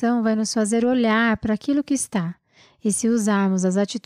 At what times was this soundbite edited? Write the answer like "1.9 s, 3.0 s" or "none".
none